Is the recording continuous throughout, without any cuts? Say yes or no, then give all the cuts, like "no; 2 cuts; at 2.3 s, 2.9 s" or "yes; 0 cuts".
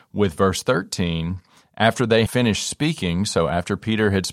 no; 1 cut; at 2.3 s